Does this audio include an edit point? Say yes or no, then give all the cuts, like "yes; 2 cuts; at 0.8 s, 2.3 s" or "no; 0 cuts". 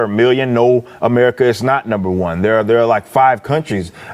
no; 0 cuts